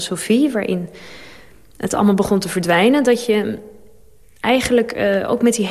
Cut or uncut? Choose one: uncut